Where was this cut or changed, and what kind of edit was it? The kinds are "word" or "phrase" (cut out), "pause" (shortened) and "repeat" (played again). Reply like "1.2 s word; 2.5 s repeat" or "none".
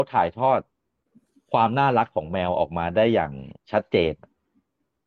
1.1 s pause; 3.6 s pause

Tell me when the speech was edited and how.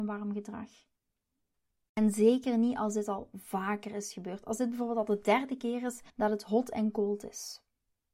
1.5 s pause; 6.1 s pause

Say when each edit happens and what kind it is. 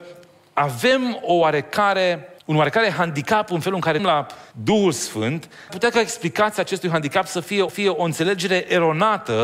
2.4 s pause; 4.0 s phrase; 4.5 s pause; 5.7 s word; 7.7 s repeat

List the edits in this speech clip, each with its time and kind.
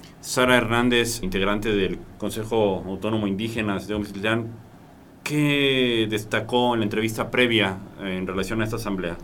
1.2 s word

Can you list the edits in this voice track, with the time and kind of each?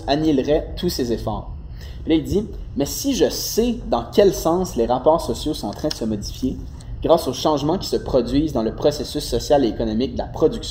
none

